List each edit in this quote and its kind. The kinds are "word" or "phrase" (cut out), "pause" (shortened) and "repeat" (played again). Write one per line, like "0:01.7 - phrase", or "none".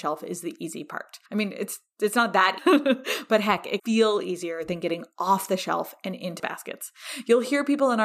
0:01.3 - pause
0:02.6 - word
0:03.8 - word
0:06.4 - word